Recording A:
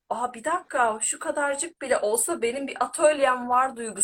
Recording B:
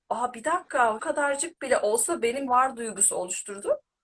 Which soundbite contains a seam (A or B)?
B